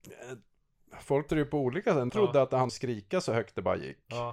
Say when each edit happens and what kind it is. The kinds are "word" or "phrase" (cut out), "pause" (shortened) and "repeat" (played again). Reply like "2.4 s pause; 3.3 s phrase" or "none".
1.3 s word; 2.1 s word; 2.7 s word